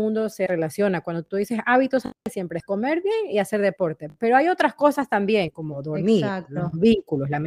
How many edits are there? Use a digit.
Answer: 1